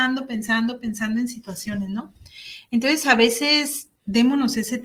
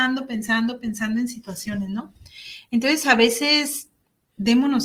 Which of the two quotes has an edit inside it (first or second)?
first